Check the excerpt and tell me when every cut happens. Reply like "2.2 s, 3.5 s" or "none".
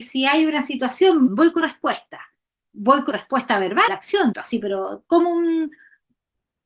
1.3 s, 1.6 s, 3.1 s, 3.9 s, 4.3 s